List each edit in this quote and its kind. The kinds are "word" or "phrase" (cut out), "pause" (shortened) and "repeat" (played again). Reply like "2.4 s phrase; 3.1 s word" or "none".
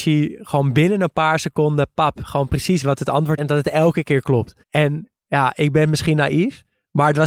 2.8 s word; 3.4 s word; 4.6 s pause